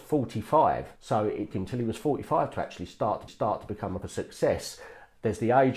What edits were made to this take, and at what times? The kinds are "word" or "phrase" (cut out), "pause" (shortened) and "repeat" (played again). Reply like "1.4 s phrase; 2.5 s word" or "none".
1.0 s pause; 1.5 s word; 3.3 s repeat; 4.0 s word

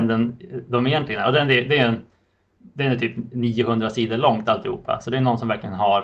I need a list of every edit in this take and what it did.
none

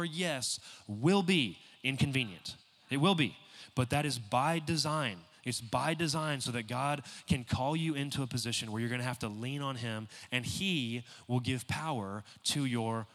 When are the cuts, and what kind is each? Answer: none

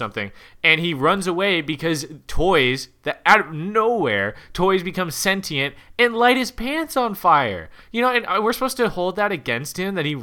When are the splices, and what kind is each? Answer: none

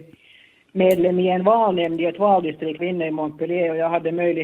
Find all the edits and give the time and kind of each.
2.8 s word

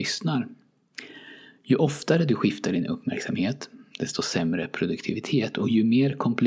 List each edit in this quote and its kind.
none

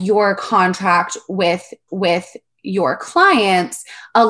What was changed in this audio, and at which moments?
1.9 s repeat

